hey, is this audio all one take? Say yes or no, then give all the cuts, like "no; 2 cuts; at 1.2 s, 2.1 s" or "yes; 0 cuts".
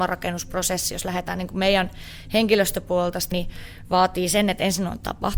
no; 1 cut; at 3.3 s